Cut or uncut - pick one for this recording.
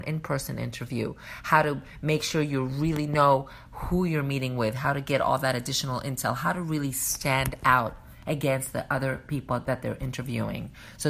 uncut